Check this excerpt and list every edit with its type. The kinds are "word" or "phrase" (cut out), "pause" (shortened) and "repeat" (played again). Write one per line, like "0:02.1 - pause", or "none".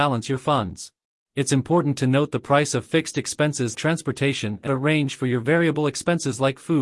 0:01.0 - pause
0:03.7 - word
0:04.7 - word